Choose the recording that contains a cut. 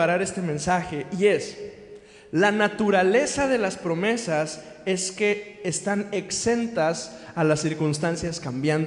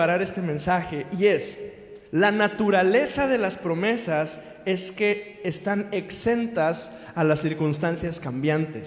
second; 1 cut; at 2.1 s

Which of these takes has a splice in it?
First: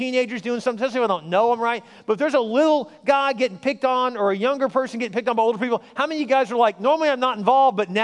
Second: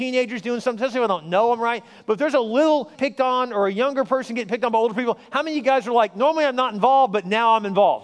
second; 1 cut; at 2.9 s

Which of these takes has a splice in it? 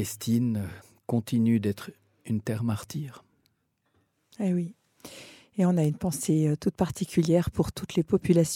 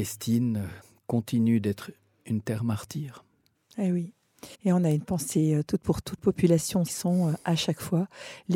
second; 5 cuts; at 3.5 s, 4.5 s, 5.8 s, 6.2 s, 6.9 s

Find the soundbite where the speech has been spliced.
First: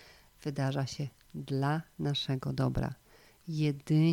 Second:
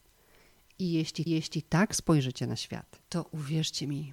second; 2 cuts; at 1.3 s, 3.0 s

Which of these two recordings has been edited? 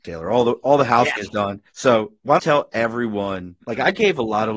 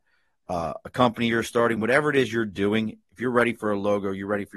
first; 4 cuts; at 1.2 s, 1.7 s, 2.4 s, 3.6 s

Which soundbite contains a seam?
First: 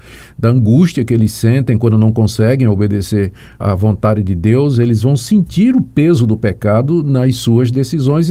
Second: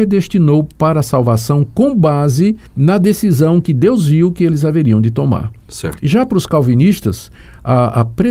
second; 1 cut; at 2.7 s

